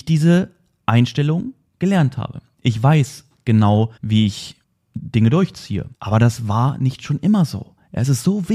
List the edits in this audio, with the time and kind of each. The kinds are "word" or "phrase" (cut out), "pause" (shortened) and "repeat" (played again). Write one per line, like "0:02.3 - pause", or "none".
0:04.0 - pause
0:04.6 - pause
0:05.9 - pause